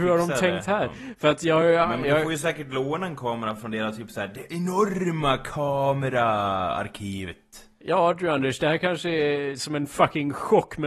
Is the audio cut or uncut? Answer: uncut